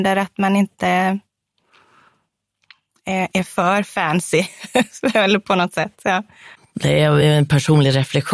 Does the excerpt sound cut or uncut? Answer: uncut